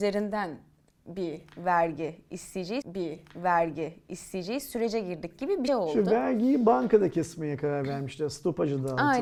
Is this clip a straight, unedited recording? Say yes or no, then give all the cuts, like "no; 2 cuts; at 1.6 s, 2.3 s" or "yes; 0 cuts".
no; 2 cuts; at 2.8 s, 5.7 s